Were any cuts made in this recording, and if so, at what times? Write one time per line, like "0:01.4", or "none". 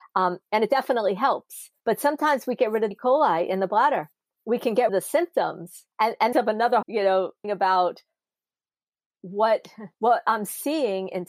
0:01.8
0:02.6
0:02.9
0:04.9
0:05.9
0:06.3
0:06.8
0:07.4
0:09.9